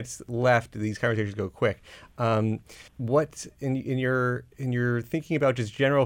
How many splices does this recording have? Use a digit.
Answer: 1